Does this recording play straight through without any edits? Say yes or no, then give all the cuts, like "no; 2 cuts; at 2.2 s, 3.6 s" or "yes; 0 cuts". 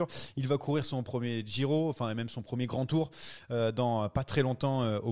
yes; 0 cuts